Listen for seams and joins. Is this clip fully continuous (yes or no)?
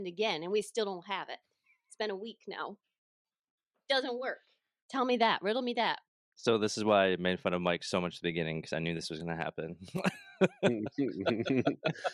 yes